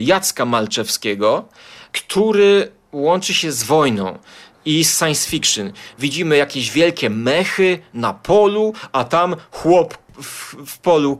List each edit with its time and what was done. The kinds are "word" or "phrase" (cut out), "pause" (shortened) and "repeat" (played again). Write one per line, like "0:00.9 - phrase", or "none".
none